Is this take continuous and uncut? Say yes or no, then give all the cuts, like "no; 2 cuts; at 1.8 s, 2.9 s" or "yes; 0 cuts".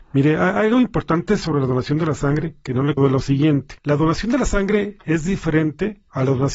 no; 2 cuts; at 3.0 s, 3.8 s